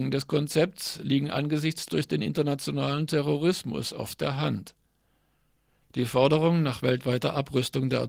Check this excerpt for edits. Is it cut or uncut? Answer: cut